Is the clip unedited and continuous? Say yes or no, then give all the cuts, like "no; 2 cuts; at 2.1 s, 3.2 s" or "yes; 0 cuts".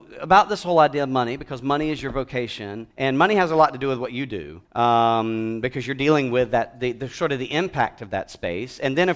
no; 2 cuts; at 2.9 s, 4.6 s